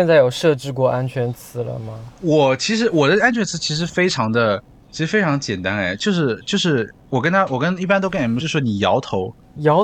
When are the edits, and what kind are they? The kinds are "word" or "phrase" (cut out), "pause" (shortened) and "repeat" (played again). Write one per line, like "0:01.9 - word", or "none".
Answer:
0:08.4 - word